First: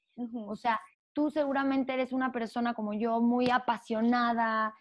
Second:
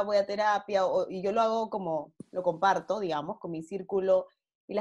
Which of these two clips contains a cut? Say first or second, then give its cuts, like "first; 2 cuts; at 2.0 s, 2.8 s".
first; 1 cut; at 0.9 s